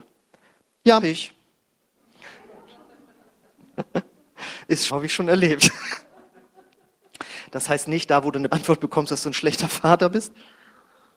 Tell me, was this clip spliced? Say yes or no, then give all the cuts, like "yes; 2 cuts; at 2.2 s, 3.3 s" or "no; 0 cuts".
yes; 3 cuts; at 1.0 s, 4.9 s, 8.5 s